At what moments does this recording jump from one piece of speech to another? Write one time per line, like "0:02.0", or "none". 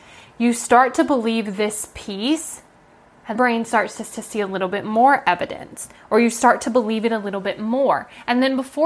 0:03.3
0:04.1